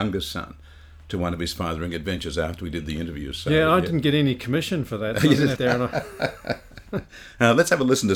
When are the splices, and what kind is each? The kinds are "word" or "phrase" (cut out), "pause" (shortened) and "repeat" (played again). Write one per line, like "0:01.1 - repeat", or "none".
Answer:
0:05.6 - word